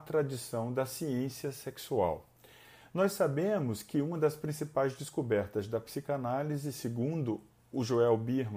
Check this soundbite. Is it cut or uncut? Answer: uncut